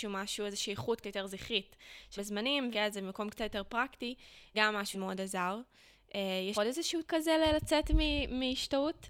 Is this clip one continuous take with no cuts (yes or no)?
no